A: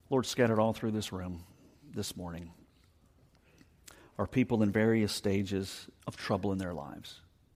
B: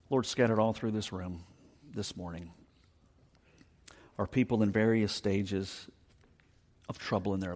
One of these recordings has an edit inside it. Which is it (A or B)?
A